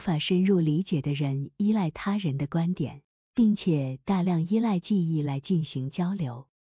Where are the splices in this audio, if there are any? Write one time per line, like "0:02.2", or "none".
0:03.2